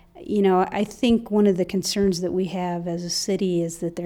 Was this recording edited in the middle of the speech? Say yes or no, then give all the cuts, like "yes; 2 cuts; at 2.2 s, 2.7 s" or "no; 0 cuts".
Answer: no; 0 cuts